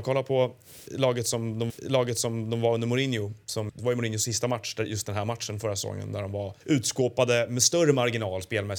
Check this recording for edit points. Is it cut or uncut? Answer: cut